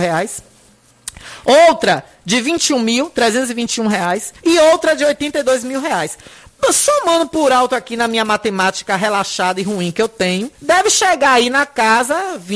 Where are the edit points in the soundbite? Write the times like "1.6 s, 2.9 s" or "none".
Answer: 4.4 s, 10.6 s